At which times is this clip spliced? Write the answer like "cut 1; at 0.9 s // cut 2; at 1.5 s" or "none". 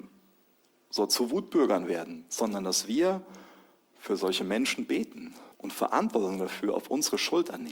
cut 1; at 5.5 s